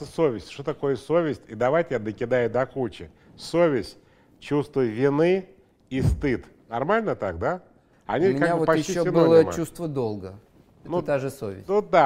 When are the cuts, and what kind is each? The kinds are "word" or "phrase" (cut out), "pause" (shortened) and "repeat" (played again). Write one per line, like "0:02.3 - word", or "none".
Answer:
none